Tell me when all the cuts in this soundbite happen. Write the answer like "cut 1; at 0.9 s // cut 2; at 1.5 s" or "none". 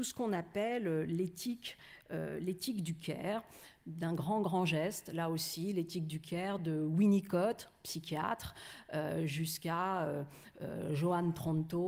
none